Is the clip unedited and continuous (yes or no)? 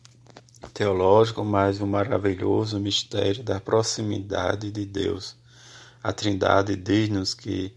yes